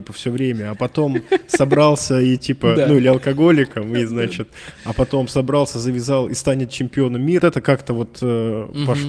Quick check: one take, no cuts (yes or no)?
no